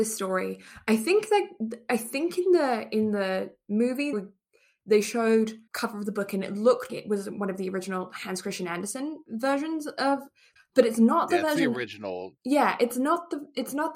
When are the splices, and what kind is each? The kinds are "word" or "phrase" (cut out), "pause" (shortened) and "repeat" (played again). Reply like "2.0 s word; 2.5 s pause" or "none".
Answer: 4.1 s word; 5.7 s word; 6.9 s word; 10.6 s phrase; 12.4 s pause